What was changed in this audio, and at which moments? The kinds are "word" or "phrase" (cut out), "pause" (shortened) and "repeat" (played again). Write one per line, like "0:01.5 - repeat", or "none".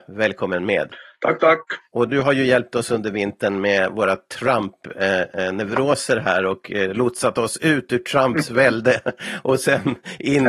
none